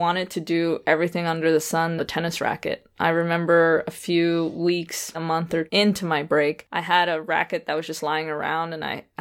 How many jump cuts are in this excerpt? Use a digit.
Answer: 3